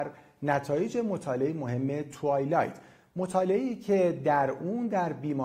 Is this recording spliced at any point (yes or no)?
no